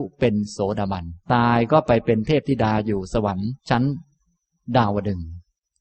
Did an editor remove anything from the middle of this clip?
yes; 2 cuts; at 1.2 s, 3.6 s

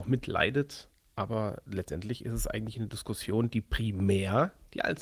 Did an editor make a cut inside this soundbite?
no; 0 cuts

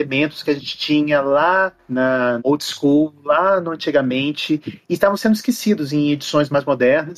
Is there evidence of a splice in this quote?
yes; 1 cut; at 2.4 s

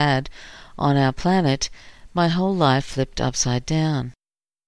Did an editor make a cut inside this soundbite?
no; 0 cuts

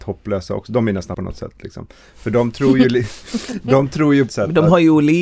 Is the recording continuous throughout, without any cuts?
no; 2 cuts; at 1.1 s, 4.3 s

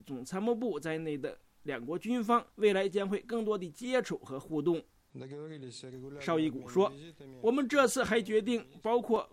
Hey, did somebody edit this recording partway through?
yes; 1 cut; at 2.5 s

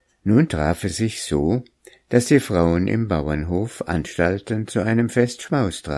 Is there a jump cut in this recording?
no; 0 cuts

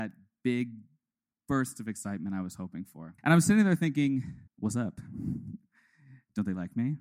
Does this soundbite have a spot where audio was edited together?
yes; 2 cuts; at 3.2 s, 4.5 s

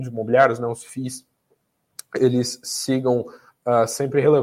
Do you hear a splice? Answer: no; 0 cuts

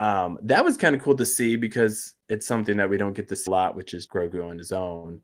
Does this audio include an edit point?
yes; 2 cuts; at 3.5 s, 4.1 s

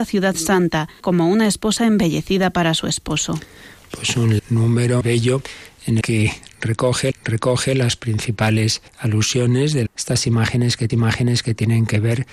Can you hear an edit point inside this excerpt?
yes; 8 cuts; at 1.0 s, 4.4 s, 5.0 s, 6.0 s, 7.1 s, 8.9 s, 9.9 s, 10.9 s

